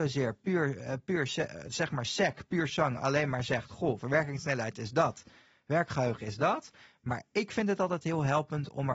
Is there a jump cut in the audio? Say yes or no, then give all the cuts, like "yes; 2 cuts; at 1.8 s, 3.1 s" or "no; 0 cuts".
no; 0 cuts